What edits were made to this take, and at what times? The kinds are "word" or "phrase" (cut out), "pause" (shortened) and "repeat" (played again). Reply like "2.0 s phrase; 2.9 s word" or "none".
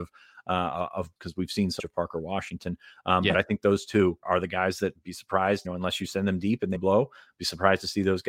1.2 s word; 1.8 s word; 4.2 s word; 4.9 s word; 5.6 s word; 6.7 s word